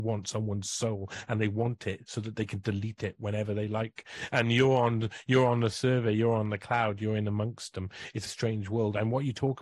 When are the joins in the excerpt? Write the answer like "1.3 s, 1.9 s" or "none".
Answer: 8.3 s